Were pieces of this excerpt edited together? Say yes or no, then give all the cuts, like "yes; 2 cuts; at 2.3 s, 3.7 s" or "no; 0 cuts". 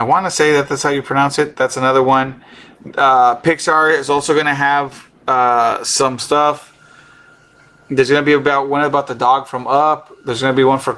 no; 0 cuts